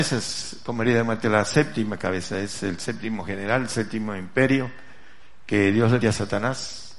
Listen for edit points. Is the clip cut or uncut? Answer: cut